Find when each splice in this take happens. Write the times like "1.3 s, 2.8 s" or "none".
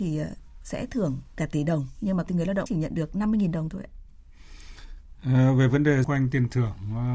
2.3 s, 2.7 s, 6.0 s

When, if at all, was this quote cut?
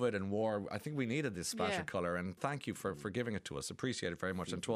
2.4 s

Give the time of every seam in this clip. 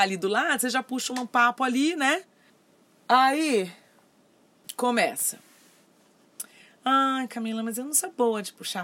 none

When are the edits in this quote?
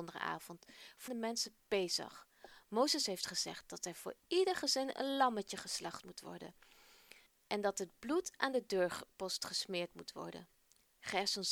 1.1 s, 7.3 s

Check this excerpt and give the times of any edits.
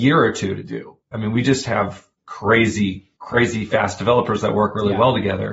1.0 s, 3.2 s

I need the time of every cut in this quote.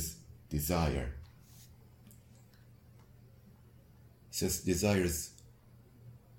none

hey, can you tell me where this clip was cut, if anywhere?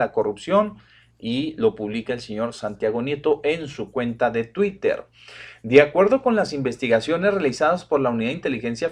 none

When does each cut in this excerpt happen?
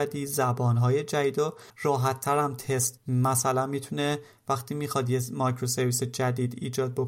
1.7 s, 3.0 s

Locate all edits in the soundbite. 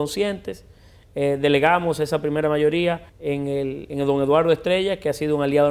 3.1 s

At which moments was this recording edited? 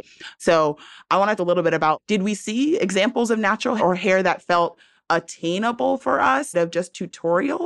1.4 s, 3.8 s, 6.5 s

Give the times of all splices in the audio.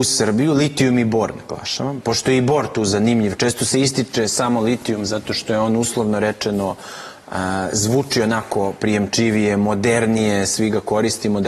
none

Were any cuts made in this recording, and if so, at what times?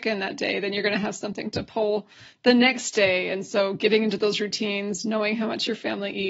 none

